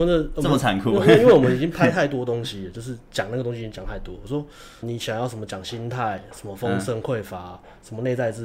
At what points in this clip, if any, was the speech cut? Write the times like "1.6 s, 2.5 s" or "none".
4.8 s